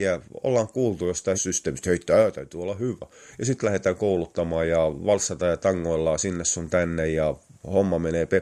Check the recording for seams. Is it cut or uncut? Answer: cut